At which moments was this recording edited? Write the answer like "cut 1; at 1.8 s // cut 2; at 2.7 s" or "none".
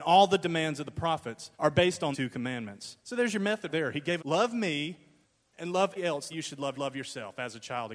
cut 1; at 1.5 s // cut 2; at 2.1 s // cut 3; at 3.0 s // cut 4; at 3.7 s // cut 5; at 4.2 s // cut 6; at 5.2 s // cut 7; at 6.0 s // cut 8; at 6.3 s // cut 9; at 6.7 s